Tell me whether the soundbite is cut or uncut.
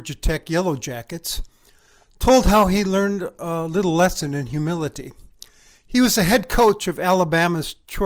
uncut